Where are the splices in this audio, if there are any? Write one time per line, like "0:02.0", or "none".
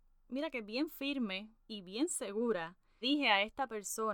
0:01.6
0:03.0